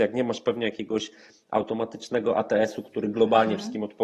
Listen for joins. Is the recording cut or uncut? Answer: uncut